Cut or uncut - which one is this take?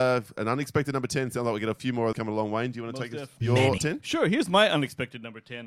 cut